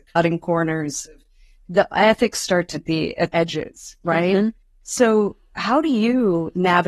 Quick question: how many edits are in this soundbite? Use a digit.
2